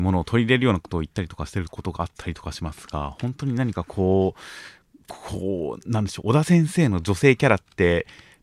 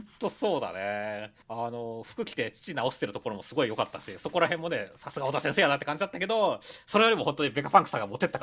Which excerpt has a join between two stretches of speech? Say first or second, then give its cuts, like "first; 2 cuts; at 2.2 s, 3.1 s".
second; 1 cut; at 1.4 s